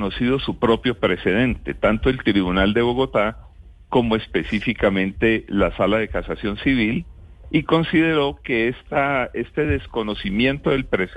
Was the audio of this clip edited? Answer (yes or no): no